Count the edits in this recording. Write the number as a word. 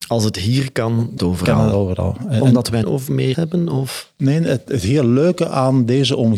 four